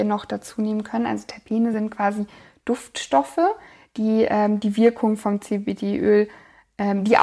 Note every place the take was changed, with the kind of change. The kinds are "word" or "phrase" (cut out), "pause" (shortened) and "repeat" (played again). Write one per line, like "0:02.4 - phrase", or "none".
none